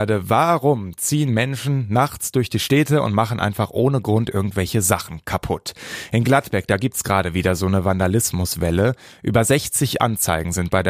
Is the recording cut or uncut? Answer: uncut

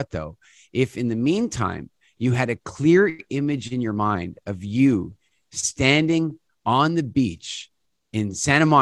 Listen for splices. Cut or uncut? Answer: uncut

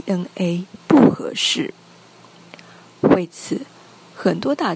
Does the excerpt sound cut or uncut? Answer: uncut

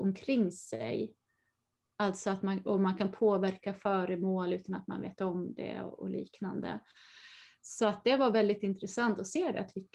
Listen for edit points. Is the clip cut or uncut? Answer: uncut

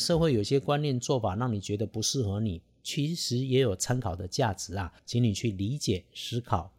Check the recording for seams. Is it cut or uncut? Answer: uncut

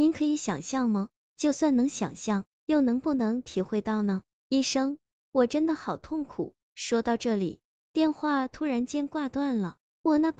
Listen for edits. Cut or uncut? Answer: uncut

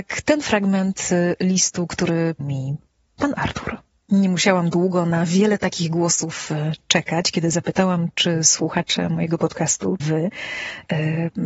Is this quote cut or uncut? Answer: cut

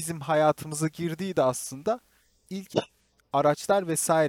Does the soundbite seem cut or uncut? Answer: uncut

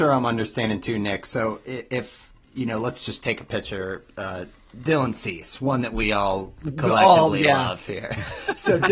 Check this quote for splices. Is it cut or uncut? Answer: cut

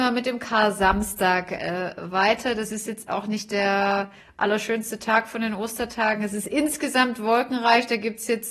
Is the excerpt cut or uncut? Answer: cut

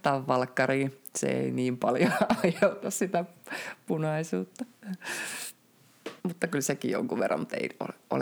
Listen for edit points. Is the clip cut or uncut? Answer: cut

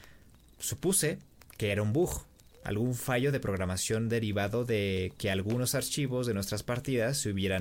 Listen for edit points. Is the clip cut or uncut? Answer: uncut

